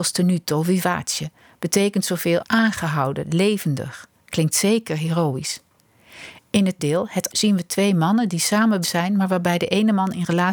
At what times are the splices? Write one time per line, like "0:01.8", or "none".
0:02.4
0:06.8
0:07.3
0:08.8